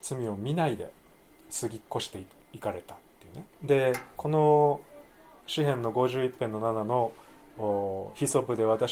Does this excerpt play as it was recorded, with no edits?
no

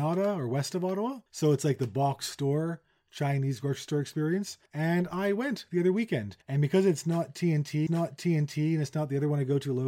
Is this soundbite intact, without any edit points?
no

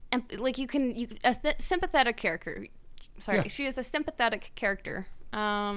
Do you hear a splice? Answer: no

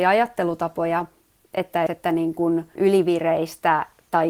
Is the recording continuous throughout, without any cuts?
no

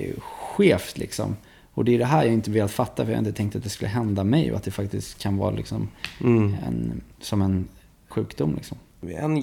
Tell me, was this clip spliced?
yes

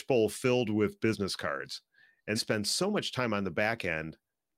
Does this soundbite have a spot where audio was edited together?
yes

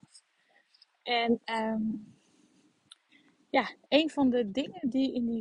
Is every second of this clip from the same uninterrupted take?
yes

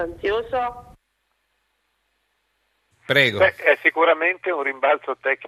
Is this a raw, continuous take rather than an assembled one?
yes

